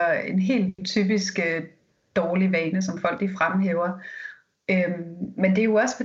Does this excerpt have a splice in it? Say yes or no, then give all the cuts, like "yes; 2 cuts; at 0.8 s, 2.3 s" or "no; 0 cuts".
no; 0 cuts